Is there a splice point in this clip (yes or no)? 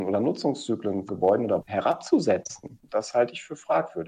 yes